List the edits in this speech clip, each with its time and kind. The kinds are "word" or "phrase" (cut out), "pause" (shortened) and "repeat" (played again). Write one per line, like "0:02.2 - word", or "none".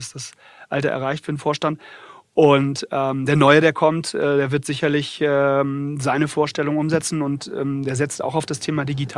none